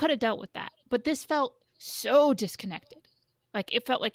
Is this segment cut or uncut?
uncut